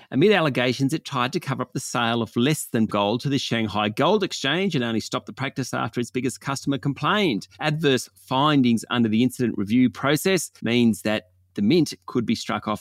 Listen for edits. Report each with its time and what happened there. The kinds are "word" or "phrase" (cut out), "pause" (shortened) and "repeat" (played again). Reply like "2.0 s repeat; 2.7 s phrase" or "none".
2.9 s word; 7.5 s pause; 10.6 s pause

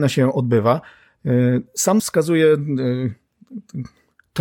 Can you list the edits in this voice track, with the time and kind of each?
2.0 s word

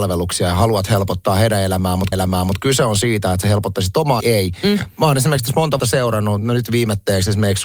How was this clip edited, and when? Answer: 2.1 s repeat; 4.2 s word; 5.8 s word

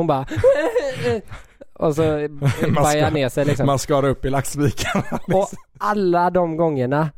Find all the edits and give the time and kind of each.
none

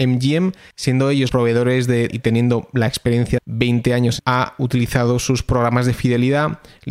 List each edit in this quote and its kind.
1.3 s word; 2.1 s word; 3.4 s word; 4.2 s phrase

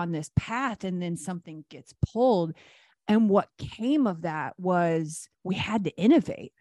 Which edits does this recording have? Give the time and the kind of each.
5.3 s pause

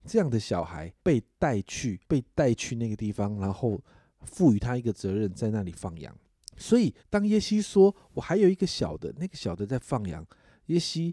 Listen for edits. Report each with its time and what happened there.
1.0 s pause; 2.0 s pause; 6.3 s pause; 7.0 s pause

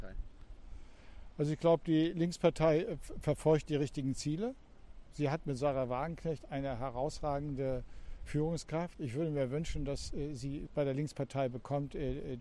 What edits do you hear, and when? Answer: 10.7 s phrase

